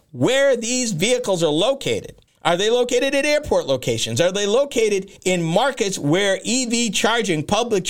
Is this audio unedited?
no; 2 cuts; at 2.3 s, 5.2 s

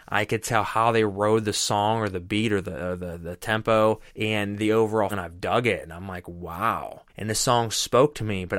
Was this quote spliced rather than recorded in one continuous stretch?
yes; 3 cuts; at 4.1 s, 5.1 s, 7.1 s

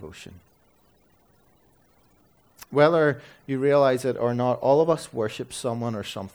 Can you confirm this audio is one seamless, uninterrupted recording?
yes; 0 cuts

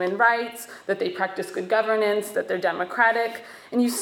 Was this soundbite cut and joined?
no; 0 cuts

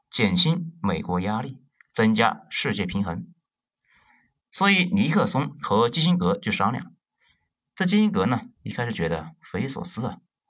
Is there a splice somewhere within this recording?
no; 0 cuts

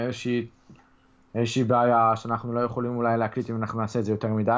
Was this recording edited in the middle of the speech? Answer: no; 0 cuts

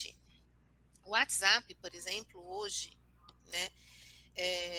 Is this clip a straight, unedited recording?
yes; 0 cuts

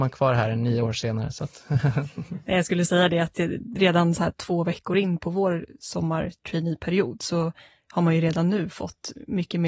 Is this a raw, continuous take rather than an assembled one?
yes; 0 cuts

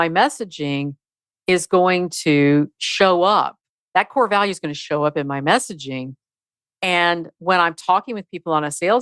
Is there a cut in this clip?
no; 0 cuts

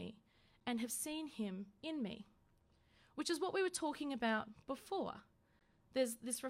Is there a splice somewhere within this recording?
no; 0 cuts

